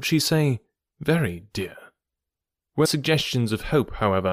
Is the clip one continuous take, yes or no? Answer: no